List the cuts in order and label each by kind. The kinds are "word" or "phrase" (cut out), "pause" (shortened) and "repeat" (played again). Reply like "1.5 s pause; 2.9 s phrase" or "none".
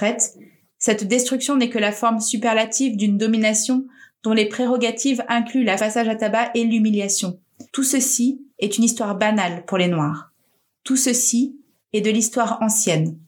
5.8 s phrase; 7.7 s pause; 8.5 s pause